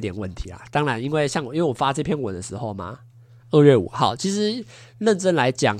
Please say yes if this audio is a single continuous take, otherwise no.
yes